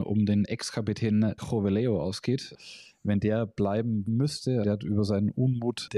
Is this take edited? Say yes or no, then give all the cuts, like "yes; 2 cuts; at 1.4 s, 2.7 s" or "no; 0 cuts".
yes; 3 cuts; at 1.4 s, 4.1 s, 4.6 s